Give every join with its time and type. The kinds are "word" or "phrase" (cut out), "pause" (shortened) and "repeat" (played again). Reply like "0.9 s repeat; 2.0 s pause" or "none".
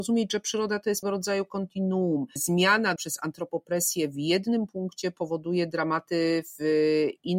1.0 s word; 2.4 s word; 3.0 s word

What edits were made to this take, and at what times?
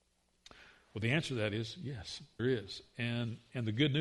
2.4 s word

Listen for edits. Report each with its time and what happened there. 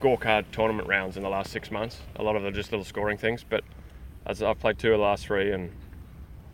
none

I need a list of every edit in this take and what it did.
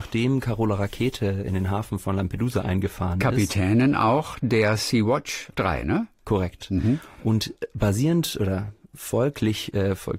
5.5 s word

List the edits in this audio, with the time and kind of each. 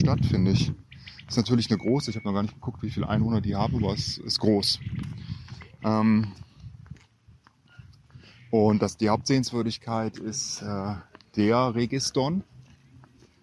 none

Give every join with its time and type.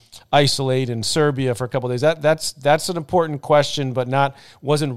none

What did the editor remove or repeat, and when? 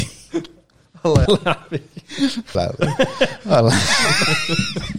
1.3 s word; 2.5 s word

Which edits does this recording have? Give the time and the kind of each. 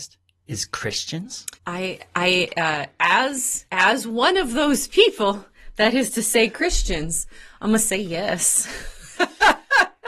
1.6 s pause; 3.7 s pause

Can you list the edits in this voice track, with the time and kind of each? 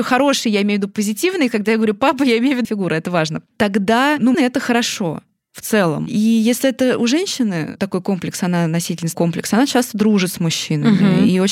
2.6 s word; 3.5 s pause; 4.3 s word; 9.1 s word

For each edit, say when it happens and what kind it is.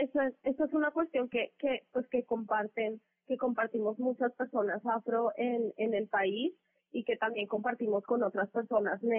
none

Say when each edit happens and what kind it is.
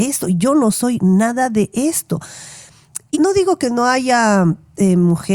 3.1 s word

